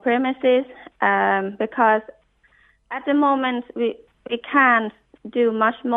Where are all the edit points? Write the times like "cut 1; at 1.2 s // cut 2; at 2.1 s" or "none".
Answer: none